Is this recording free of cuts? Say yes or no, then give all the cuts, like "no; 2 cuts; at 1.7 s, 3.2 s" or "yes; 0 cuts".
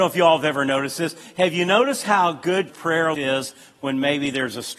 no; 2 cuts; at 2.7 s, 3.1 s